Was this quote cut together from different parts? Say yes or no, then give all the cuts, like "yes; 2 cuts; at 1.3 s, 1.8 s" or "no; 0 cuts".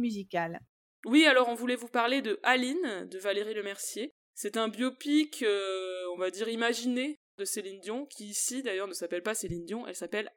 no; 0 cuts